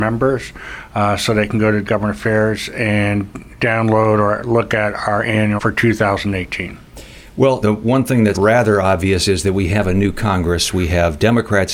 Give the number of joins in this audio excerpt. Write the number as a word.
four